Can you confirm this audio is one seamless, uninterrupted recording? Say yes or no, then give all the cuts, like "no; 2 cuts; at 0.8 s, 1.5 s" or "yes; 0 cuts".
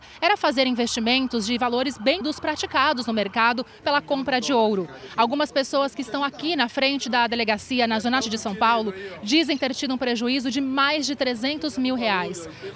no; 2 cuts; at 2.2 s, 8.2 s